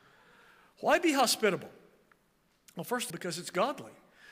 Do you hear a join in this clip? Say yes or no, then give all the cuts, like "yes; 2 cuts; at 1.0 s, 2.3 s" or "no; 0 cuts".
yes; 1 cut; at 3.1 s